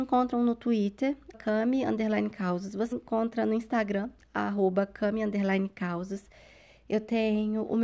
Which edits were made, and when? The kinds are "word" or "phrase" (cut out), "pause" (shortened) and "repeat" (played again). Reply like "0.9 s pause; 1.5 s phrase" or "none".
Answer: 1.3 s word; 2.9 s word

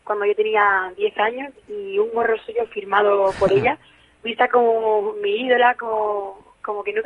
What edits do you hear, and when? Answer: none

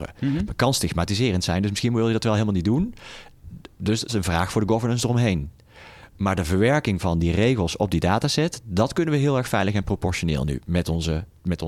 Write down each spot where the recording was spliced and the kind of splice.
4.1 s word

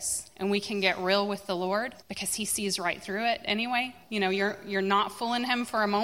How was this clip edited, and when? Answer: 2.0 s pause; 4.0 s pause

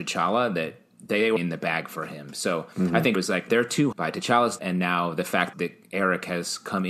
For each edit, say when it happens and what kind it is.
1.4 s word; 3.2 s word; 3.5 s word; 3.9 s word; 4.6 s word; 5.5 s word

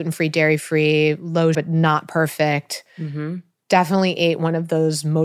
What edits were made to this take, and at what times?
1.5 s word

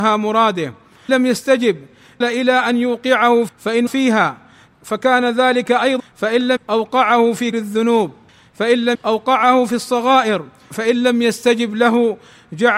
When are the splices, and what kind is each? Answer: 1.1 s word; 2.2 s word; 3.5 s word; 3.9 s word; 6.0 s word; 6.6 s word; 7.5 s word; 8.9 s word

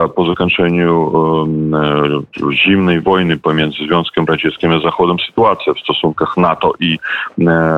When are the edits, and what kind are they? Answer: none

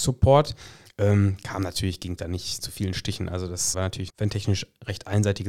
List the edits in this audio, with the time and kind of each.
2.2 s word; 2.6 s word; 3.7 s word; 4.1 s word

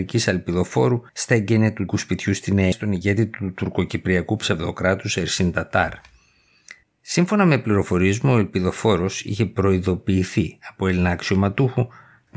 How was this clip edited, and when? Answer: 1.1 s pause; 1.9 s word; 2.7 s phrase; 6.8 s pause

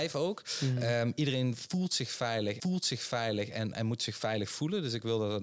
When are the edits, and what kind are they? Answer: 2.6 s repeat

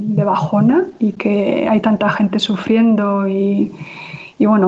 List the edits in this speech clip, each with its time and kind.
none

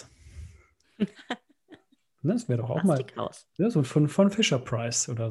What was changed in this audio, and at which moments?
none

